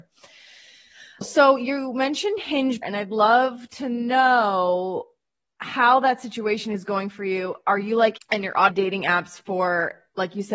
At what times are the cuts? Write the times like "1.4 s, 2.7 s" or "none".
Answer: 2.8 s, 8.2 s, 8.7 s